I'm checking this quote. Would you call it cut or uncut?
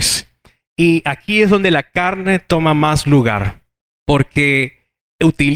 cut